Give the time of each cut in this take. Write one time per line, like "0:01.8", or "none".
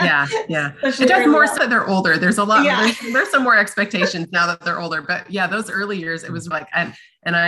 0:01.6
0:06.5